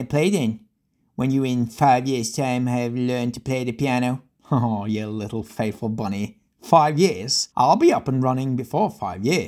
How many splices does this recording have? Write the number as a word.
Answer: one